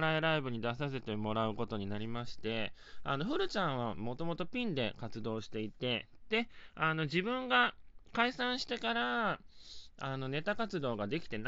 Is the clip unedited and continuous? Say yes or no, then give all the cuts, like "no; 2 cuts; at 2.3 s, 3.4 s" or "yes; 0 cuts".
yes; 0 cuts